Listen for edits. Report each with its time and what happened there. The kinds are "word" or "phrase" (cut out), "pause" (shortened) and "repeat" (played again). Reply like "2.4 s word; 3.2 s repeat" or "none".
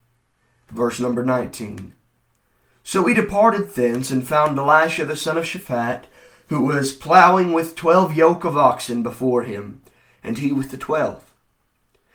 none

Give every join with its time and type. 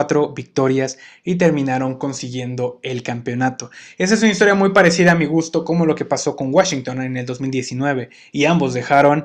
none

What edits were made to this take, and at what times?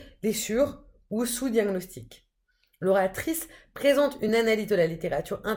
none

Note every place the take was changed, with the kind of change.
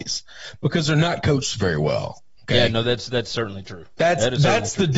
3.9 s pause

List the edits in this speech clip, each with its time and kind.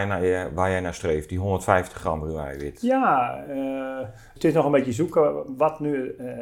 none

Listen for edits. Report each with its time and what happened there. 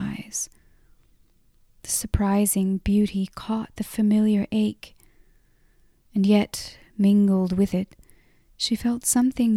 3.8 s phrase

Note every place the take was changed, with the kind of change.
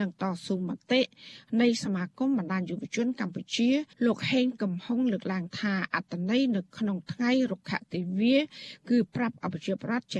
3.9 s pause

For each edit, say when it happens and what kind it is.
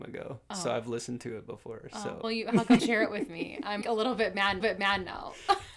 2.2 s word; 2.8 s phrase; 3.8 s word; 4.6 s repeat

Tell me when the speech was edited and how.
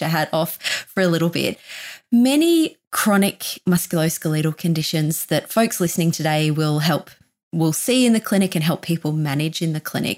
none

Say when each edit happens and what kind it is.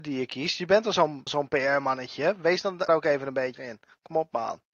1.3 s word; 2.9 s phrase; 3.5 s word

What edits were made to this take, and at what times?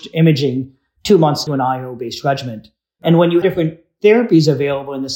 1.5 s word; 3.4 s word

